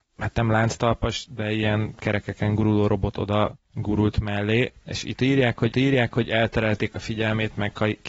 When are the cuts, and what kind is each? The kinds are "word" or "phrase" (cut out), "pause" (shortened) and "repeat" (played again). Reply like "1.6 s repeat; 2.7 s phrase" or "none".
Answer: 5.7 s repeat